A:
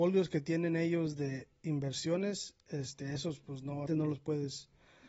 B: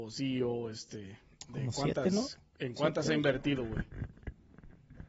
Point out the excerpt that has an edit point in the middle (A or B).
A